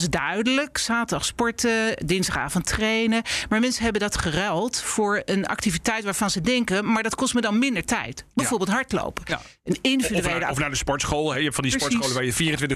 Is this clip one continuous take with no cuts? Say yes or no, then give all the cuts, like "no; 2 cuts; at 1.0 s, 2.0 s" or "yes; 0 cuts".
yes; 0 cuts